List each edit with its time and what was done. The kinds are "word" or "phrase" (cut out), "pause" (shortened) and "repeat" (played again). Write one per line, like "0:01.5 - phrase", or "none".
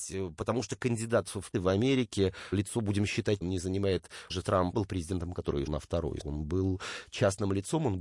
0:01.5 - word
0:02.5 - word
0:03.4 - word
0:04.3 - word
0:04.7 - word
0:05.7 - word
0:06.2 - word